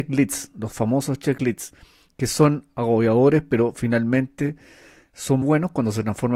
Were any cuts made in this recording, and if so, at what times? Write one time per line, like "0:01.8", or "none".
0:05.4